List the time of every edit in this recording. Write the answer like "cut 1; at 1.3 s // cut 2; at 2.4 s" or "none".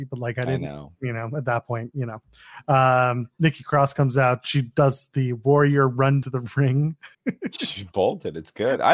cut 1; at 6.2 s // cut 2; at 7.1 s